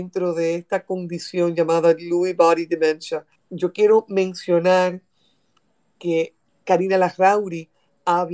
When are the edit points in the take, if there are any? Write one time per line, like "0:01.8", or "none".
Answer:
0:03.3